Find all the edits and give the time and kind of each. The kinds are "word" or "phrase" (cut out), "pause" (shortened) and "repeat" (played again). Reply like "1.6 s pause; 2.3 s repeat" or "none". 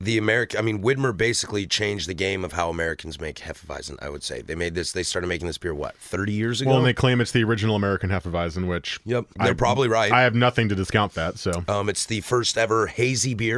9.3 s pause